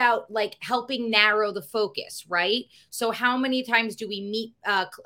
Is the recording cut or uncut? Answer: uncut